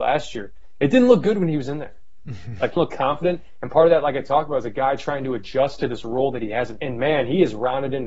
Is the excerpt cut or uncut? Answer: cut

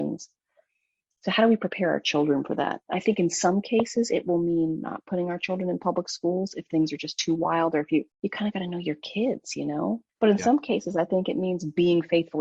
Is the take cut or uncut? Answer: cut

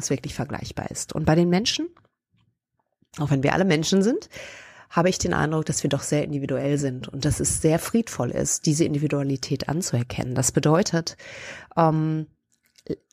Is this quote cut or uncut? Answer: uncut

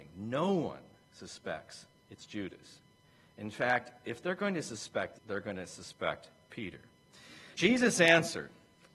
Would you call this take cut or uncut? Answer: cut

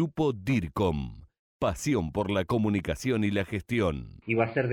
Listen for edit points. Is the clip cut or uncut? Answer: uncut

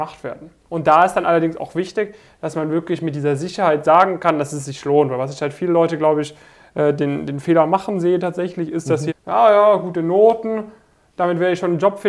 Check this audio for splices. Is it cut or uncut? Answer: cut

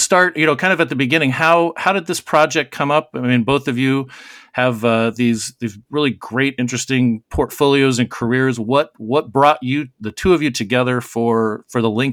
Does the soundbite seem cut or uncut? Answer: uncut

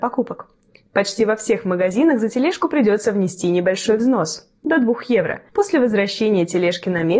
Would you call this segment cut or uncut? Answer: cut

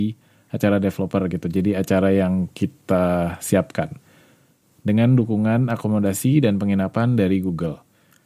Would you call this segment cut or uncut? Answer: uncut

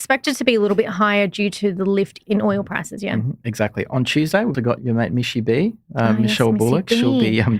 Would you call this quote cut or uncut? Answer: cut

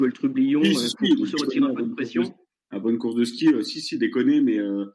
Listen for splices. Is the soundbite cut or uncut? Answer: uncut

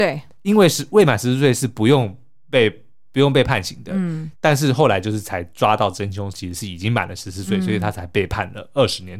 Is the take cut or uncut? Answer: cut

